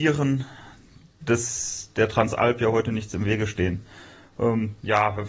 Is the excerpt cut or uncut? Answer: uncut